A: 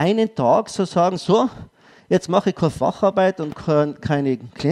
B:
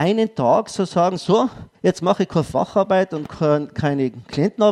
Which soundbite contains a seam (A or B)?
B